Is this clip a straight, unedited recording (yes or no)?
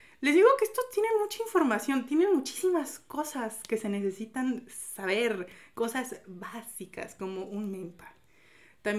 yes